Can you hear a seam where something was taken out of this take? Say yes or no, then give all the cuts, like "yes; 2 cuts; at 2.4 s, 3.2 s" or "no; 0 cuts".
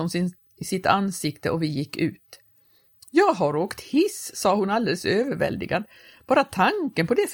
no; 0 cuts